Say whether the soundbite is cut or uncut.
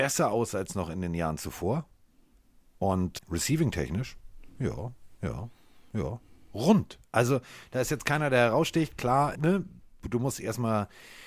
cut